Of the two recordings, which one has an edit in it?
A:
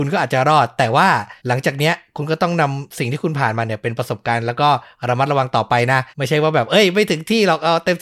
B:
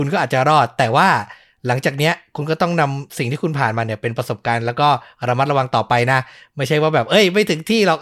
A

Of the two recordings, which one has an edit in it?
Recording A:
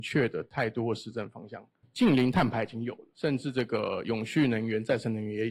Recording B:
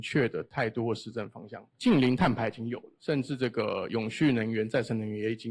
B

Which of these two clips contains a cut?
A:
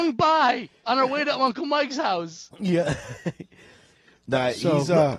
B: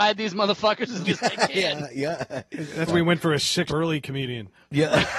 B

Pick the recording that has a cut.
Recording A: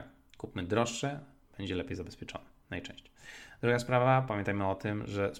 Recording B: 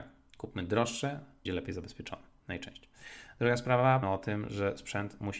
B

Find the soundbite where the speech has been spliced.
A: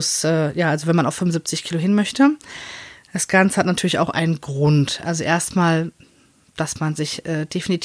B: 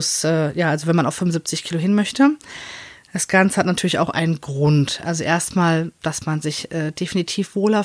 B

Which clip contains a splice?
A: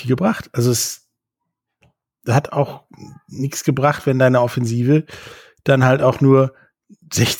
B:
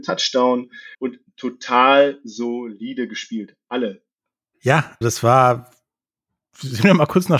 B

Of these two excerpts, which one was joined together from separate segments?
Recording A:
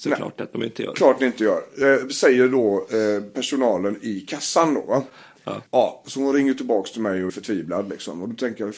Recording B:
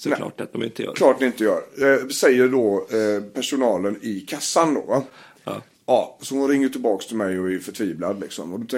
A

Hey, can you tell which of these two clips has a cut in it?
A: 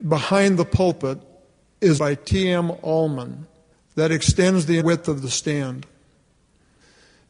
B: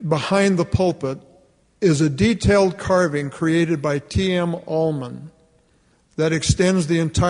A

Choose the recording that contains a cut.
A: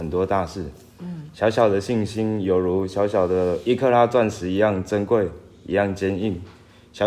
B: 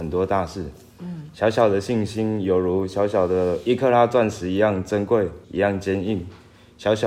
B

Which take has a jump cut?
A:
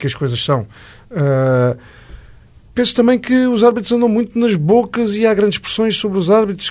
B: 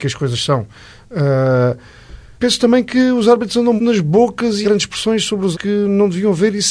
B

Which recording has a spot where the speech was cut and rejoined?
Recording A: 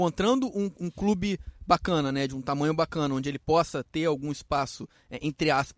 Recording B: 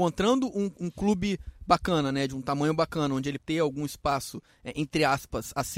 B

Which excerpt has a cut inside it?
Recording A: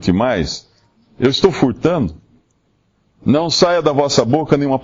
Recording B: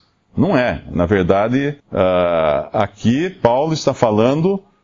B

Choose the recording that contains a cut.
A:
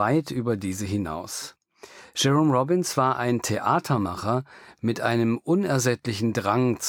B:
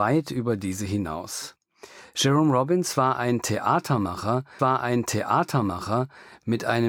B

